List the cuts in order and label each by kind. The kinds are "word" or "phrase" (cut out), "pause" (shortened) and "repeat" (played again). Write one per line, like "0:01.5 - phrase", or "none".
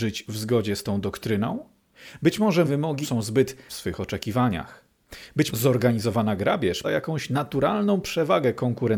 0:02.6 - word
0:03.0 - word
0:03.7 - word
0:05.5 - word
0:06.8 - word